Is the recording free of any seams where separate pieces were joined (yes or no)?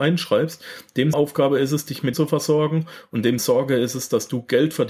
no